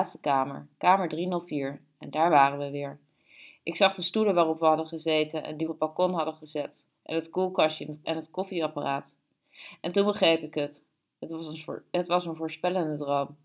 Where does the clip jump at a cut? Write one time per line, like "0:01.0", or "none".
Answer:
0:05.7
0:08.0